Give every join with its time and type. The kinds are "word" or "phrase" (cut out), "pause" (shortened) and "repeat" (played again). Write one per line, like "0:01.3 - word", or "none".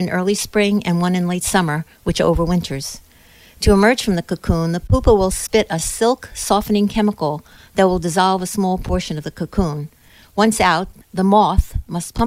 none